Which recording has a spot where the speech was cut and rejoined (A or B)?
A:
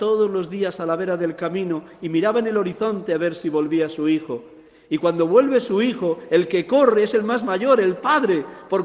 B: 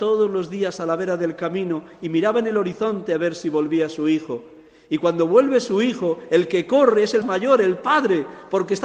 B